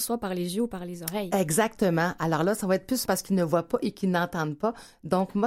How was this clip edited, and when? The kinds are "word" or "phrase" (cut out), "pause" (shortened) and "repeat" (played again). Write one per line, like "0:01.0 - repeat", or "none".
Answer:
0:03.1 - word